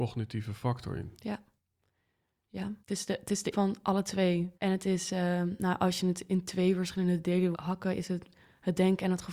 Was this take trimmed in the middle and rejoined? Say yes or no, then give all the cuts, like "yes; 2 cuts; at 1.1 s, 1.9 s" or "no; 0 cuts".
yes; 4 cuts; at 2.8 s, 3.5 s, 4.5 s, 7.5 s